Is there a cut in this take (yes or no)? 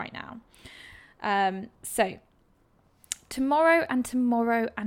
yes